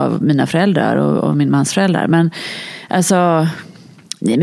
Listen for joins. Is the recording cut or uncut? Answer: uncut